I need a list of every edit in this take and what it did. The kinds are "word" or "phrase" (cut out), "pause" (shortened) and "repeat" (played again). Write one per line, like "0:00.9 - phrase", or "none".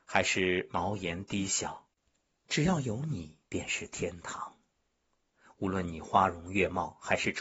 0:03.5 - pause